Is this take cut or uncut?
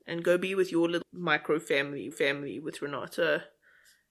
cut